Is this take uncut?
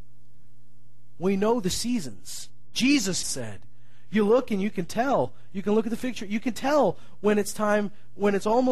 no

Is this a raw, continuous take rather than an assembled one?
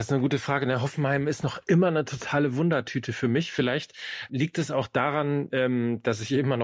no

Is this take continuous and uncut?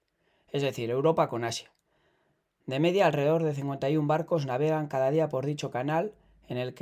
yes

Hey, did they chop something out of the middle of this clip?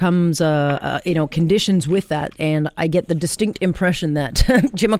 no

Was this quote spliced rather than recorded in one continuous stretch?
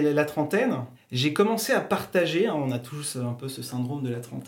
no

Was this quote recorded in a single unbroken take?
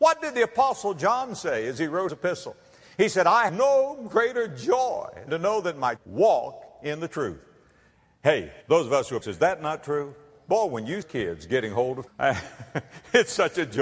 no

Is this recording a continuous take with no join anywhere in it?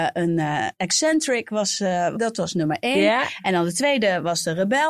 yes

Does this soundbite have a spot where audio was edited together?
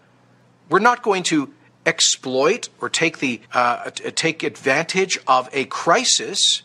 yes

